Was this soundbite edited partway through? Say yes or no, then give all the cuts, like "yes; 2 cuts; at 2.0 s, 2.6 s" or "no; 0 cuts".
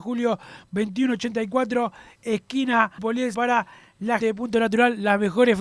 yes; 3 cuts; at 3.0 s, 3.3 s, 4.2 s